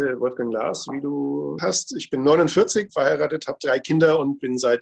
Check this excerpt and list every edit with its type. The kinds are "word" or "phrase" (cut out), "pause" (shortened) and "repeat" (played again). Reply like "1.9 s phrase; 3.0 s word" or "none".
1.6 s phrase; 2.9 s word